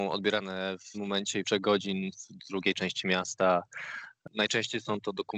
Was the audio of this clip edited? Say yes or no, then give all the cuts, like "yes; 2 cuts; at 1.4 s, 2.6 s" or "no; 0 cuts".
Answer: yes; 3 cuts; at 0.9 s, 1.4 s, 2.1 s